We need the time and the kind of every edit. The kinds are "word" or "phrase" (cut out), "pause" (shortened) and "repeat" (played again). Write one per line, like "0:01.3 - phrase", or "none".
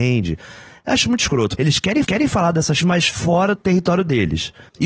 0:01.6 - word
0:02.0 - repeat
0:02.8 - word
0:03.6 - word